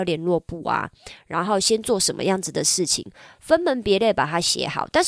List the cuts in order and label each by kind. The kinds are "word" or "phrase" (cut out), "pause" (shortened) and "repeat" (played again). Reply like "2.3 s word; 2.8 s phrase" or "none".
none